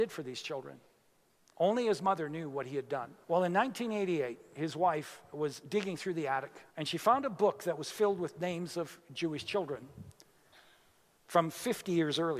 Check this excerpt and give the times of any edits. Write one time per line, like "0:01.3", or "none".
0:03.2
0:06.7